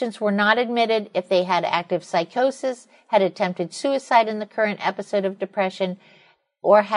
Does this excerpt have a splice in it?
no; 0 cuts

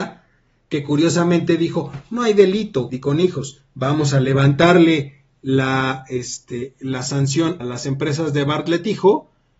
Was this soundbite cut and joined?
yes; 2 cuts; at 2.9 s, 7.6 s

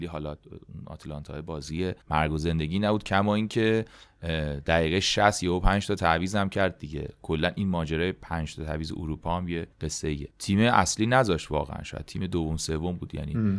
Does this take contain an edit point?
yes; 3 cuts; at 2.0 s, 9.7 s, 10.3 s

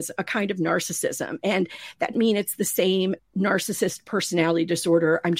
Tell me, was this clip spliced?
yes; 2 cuts; at 2.1 s, 3.2 s

